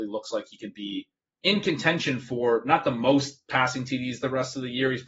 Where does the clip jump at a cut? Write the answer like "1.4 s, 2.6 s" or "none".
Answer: none